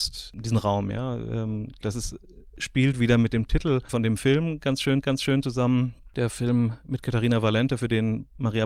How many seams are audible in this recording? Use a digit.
1